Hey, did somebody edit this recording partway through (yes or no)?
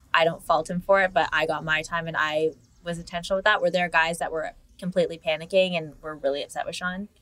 no